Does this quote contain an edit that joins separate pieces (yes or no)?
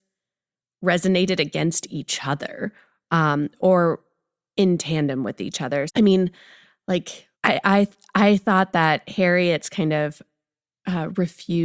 yes